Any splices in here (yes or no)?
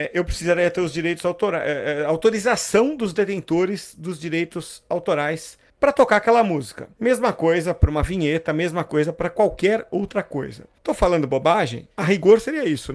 yes